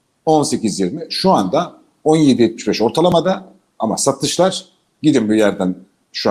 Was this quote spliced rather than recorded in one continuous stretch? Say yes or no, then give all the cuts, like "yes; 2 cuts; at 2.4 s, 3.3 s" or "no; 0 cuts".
no; 0 cuts